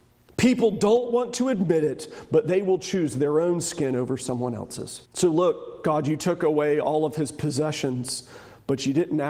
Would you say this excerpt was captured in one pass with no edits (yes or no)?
no